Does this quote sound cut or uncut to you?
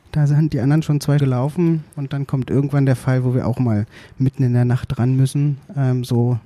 cut